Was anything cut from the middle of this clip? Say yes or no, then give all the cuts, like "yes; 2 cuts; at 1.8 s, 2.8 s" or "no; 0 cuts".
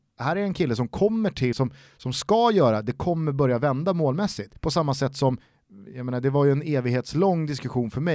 yes; 2 cuts; at 1.5 s, 4.6 s